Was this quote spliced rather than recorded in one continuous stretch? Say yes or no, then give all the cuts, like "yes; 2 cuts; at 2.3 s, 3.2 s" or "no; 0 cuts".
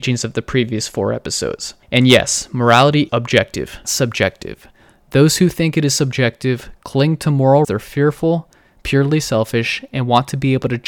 yes; 3 cuts; at 3.1 s, 3.8 s, 7.6 s